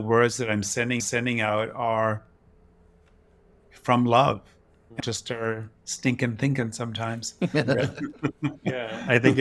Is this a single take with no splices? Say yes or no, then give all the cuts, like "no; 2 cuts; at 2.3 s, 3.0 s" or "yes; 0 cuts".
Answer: no; 2 cuts; at 1.0 s, 5.0 s